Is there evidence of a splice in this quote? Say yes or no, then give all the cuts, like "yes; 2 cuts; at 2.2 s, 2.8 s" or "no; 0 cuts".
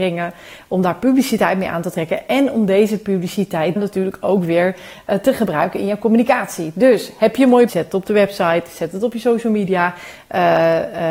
yes; 2 cuts; at 3.8 s, 7.7 s